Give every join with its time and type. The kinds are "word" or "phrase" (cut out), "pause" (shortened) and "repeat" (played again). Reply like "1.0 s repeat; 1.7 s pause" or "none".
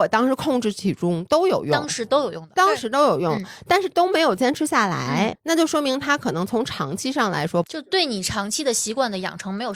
5.3 s word